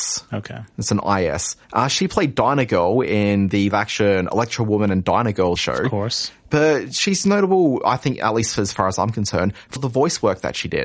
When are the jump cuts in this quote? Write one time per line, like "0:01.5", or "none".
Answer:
0:01.6
0:03.7
0:05.6
0:09.8